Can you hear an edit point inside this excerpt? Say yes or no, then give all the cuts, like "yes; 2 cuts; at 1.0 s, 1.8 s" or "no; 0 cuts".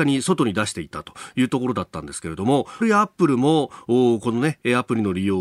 yes; 1 cut; at 2.8 s